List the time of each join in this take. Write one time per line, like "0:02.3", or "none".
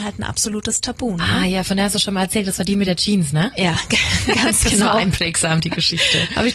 none